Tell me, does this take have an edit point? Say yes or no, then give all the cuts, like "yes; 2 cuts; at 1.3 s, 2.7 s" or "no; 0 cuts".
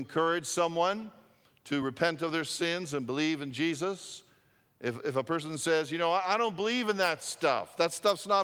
no; 0 cuts